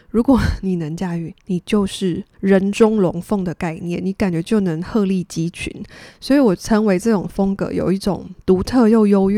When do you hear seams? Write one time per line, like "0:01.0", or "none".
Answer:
0:02.3